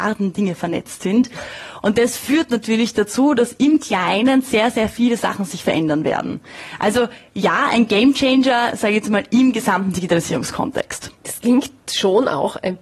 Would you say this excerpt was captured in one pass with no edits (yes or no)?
no